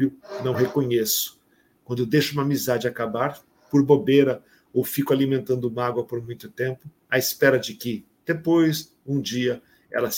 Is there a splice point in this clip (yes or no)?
no